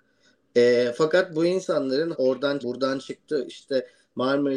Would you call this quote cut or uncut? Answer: cut